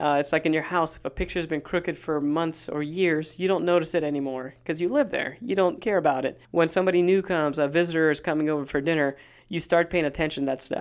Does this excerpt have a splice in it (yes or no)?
yes